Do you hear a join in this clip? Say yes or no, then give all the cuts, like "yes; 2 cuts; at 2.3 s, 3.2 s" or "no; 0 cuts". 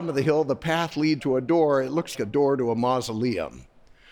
yes; 2 cuts; at 1.2 s, 2.1 s